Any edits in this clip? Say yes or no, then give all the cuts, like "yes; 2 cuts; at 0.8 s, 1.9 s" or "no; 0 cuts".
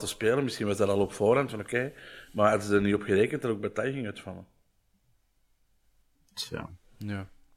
no; 0 cuts